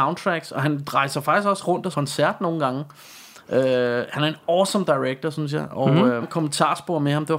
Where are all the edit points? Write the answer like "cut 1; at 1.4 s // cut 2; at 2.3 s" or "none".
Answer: cut 1; at 1.9 s // cut 2; at 6.2 s